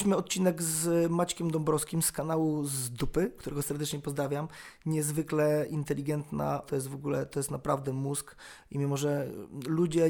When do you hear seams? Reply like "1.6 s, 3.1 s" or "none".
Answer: 6.6 s